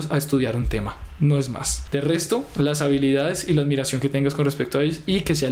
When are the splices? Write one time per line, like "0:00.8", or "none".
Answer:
none